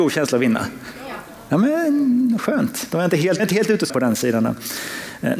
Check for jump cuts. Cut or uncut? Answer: cut